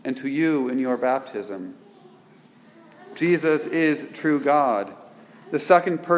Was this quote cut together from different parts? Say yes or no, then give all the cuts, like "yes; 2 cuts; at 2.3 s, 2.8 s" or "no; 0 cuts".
no; 0 cuts